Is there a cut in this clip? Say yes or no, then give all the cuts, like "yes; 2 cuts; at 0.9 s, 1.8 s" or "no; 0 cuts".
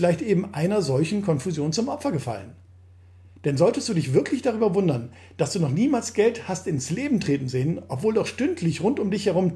no; 0 cuts